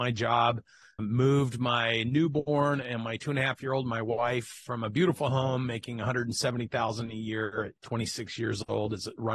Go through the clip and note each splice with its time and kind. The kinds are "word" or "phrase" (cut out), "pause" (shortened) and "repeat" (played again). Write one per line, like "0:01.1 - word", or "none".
0:01.0 - word
0:07.8 - pause

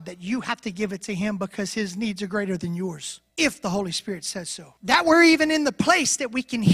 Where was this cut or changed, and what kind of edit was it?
0:03.3 - pause
0:04.8 - pause

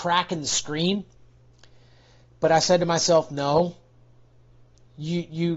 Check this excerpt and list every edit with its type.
none

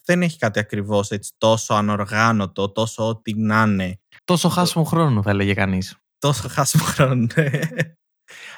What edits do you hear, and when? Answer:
0:04.2 - pause

